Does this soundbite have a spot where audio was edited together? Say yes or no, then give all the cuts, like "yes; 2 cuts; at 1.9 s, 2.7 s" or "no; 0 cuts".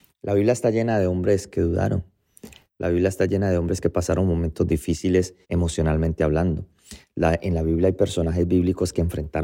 yes; 1 cut; at 5.4 s